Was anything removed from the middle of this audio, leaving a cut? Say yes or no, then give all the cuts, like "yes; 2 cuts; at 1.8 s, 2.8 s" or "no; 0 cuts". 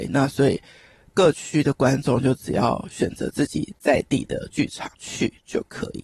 yes; 1 cut; at 4.9 s